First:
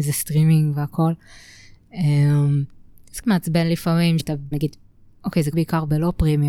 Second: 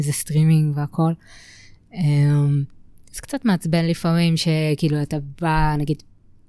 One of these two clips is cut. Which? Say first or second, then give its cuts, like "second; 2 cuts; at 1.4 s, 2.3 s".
first; 4 cuts; at 3.2 s, 4.2 s, 4.5 s, 5.5 s